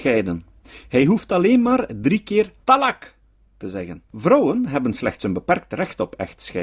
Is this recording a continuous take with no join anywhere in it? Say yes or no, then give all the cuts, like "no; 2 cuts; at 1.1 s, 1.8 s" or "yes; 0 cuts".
no; 2 cuts; at 2.6 s, 4.1 s